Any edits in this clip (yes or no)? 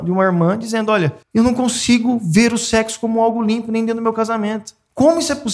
yes